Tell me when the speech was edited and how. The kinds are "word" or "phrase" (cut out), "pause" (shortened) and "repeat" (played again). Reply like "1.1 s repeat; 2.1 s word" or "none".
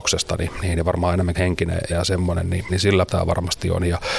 1.4 s word; 1.9 s word; 2.7 s word; 3.1 s word